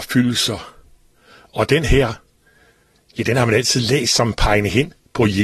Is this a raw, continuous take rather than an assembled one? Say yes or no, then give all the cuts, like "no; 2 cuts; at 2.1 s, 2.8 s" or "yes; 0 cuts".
yes; 0 cuts